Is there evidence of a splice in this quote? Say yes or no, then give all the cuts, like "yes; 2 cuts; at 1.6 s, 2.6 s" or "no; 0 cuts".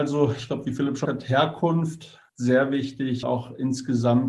yes; 3 cuts; at 1.0 s, 2.3 s, 3.2 s